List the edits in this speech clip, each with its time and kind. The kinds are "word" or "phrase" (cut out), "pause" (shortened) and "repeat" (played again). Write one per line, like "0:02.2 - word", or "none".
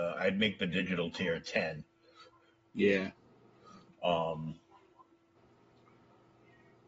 none